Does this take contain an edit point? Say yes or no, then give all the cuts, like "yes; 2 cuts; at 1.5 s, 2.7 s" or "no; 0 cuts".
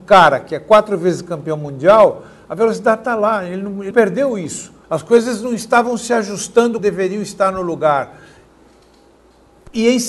yes; 3 cuts; at 3.9 s, 4.8 s, 6.8 s